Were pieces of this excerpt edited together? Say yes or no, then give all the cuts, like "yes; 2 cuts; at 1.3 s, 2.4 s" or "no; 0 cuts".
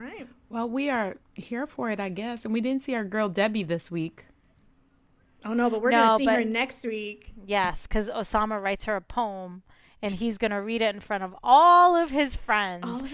no; 0 cuts